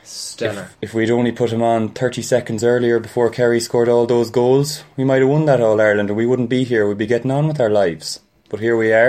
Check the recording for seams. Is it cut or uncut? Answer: uncut